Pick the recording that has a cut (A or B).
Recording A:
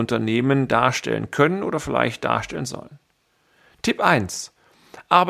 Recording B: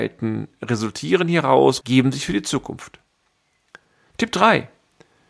B